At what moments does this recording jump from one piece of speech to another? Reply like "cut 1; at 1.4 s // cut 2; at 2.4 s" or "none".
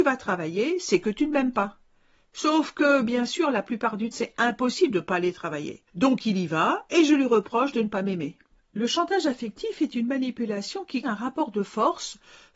cut 1; at 4.1 s // cut 2; at 5.9 s // cut 3; at 8.5 s // cut 4; at 11.0 s